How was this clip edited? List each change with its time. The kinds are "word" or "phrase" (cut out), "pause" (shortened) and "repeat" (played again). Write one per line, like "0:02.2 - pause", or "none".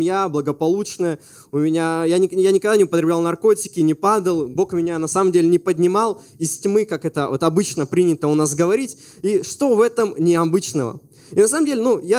none